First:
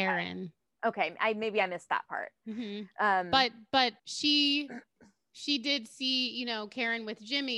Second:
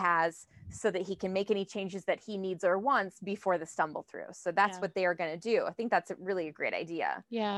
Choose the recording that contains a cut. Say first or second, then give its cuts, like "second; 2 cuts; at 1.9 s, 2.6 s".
first; 1 cut; at 4.0 s